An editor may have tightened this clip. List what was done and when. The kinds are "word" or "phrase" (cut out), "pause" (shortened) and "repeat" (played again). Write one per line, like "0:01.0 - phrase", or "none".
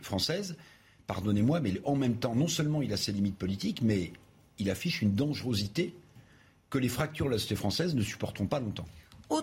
none

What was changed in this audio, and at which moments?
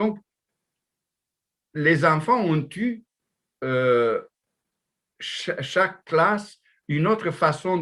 0:06.0 - pause

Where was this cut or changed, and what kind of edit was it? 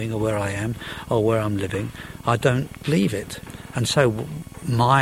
none

